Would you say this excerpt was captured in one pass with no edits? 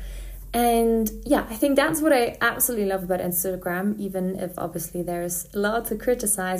yes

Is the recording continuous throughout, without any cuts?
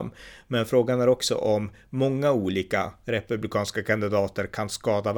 yes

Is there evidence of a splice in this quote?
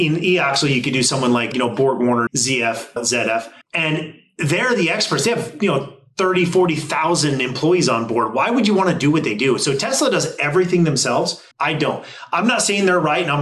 yes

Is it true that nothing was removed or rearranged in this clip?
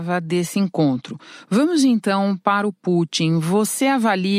yes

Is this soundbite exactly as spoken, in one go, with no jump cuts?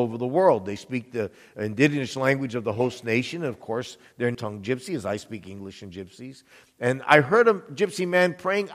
no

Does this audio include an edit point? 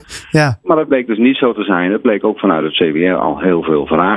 no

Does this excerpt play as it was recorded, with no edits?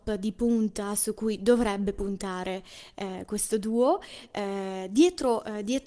yes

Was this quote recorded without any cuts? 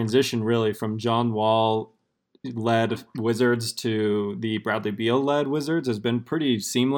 yes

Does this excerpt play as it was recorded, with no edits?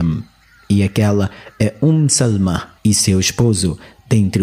no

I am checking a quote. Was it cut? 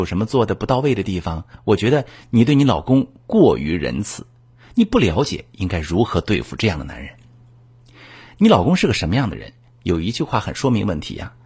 no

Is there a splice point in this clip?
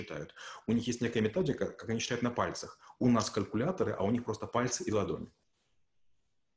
no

